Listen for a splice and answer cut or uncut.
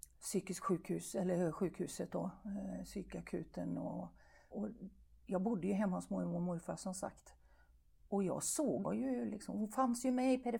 cut